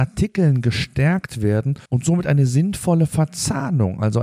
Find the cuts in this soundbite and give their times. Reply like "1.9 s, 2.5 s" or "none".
1.9 s